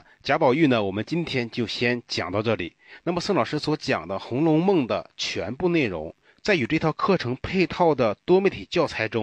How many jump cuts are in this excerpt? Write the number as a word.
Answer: one